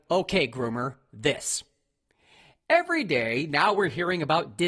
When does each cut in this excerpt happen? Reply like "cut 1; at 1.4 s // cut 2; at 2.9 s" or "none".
none